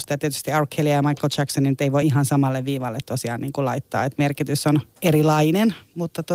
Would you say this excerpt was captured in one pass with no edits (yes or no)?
yes